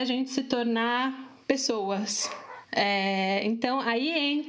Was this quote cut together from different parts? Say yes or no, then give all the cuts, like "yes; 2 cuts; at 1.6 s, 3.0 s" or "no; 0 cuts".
no; 0 cuts